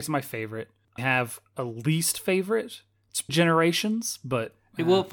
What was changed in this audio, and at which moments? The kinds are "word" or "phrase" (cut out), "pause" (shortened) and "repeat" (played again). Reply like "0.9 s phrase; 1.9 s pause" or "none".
1.0 s phrase; 3.3 s word